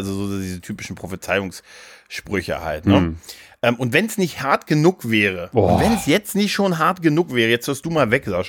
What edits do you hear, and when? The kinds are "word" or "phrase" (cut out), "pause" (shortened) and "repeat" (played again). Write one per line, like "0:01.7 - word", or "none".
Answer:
none